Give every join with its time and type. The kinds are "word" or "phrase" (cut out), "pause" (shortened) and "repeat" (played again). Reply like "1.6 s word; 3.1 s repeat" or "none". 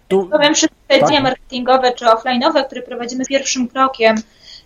1.1 s word; 2.0 s word; 3.3 s word